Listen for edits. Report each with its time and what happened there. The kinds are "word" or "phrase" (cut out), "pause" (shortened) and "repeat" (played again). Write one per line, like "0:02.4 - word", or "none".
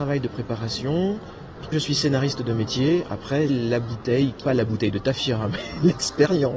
0:01.7 - word
0:03.5 - word
0:04.4 - word